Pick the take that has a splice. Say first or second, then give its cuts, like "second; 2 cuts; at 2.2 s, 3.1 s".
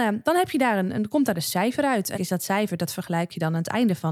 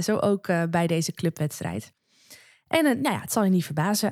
first; 1 cut; at 2.1 s